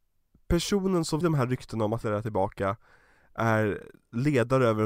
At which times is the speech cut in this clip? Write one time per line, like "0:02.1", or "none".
0:01.2
0:02.0